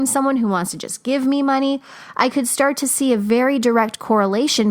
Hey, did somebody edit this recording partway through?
no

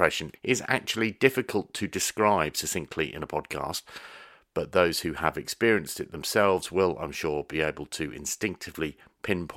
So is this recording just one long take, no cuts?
yes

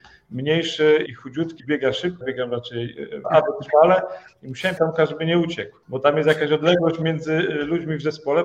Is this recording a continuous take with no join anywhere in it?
no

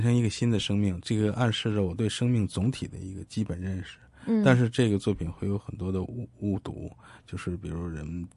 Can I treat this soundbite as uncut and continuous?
yes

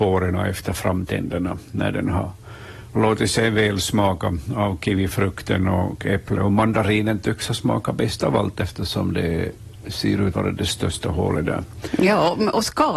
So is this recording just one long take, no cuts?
no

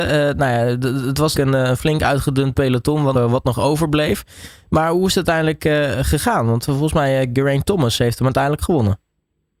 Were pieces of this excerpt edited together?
yes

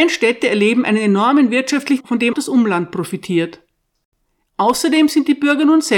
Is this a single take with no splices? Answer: no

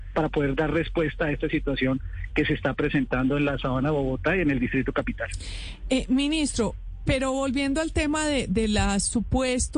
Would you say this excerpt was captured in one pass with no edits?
yes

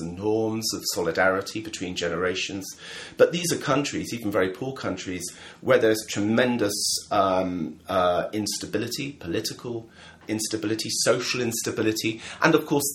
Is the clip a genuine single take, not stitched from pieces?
yes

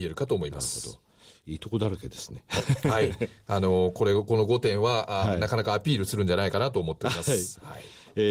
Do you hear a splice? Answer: no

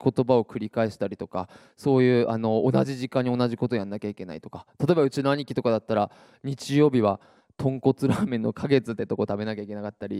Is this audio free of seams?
yes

